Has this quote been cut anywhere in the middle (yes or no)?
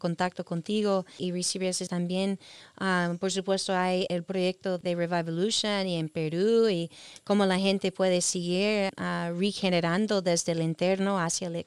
yes